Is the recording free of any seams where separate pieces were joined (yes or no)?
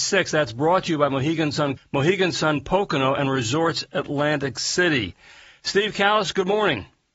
no